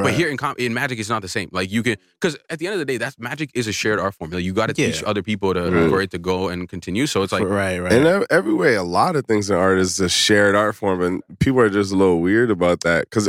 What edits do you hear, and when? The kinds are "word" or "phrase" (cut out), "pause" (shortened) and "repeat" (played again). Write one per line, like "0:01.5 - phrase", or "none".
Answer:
none

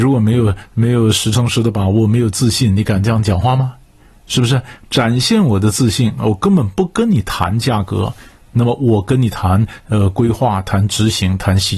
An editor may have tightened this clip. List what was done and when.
none

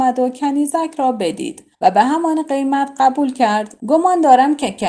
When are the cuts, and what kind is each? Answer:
0:01.7 - pause
0:03.8 - pause

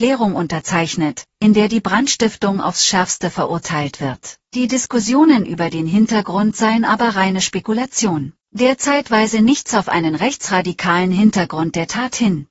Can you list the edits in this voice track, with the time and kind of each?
0:04.5 - pause
0:08.4 - pause

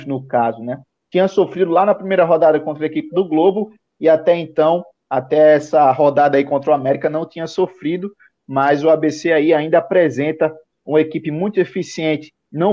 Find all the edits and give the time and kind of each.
none

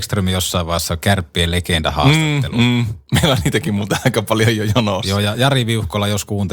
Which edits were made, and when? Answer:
none

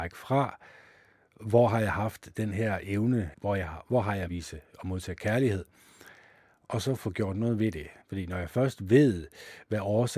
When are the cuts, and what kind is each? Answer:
0:03.3 - word
0:04.3 - phrase
0:08.0 - pause

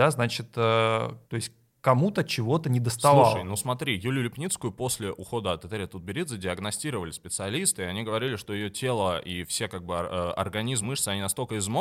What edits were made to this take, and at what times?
0:01.2 - pause
0:10.8 - word

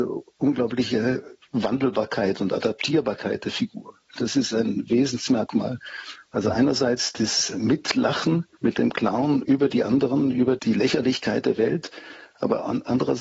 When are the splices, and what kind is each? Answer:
0:08.5 - pause

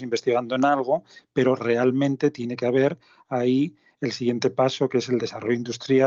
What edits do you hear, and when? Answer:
none

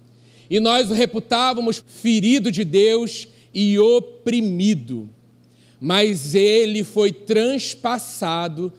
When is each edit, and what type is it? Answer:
0:01.8 - phrase

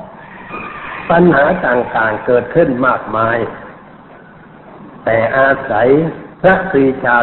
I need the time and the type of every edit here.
0:06.3 - pause

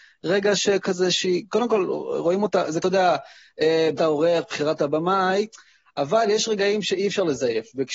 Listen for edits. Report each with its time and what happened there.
0:02.8 - word
0:04.0 - word

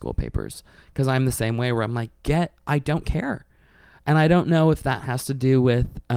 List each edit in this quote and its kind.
none

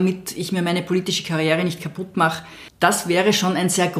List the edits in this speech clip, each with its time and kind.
none

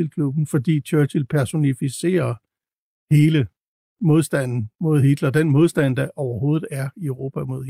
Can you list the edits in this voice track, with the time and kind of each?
none

